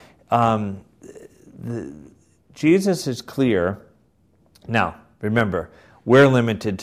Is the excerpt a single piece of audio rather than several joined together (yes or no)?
yes